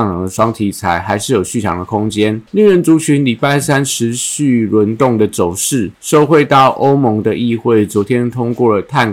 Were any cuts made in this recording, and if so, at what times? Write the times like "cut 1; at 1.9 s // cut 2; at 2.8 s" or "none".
cut 1; at 2.5 s // cut 2; at 5.9 s